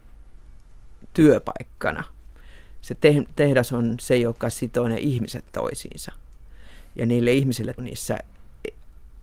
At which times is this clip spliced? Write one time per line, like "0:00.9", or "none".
0:07.8